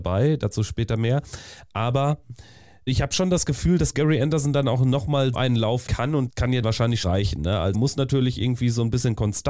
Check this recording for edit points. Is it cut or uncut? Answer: cut